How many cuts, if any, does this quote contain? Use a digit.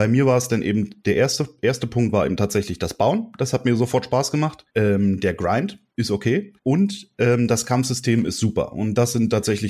3